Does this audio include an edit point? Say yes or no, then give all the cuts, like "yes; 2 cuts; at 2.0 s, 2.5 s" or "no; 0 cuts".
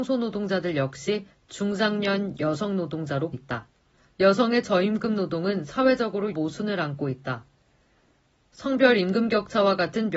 yes; 3 cuts; at 3.3 s, 3.9 s, 6.3 s